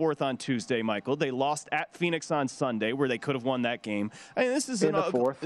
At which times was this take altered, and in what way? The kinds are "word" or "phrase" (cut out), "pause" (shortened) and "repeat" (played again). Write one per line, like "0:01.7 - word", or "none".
none